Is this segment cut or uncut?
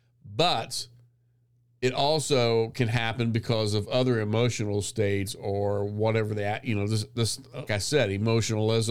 cut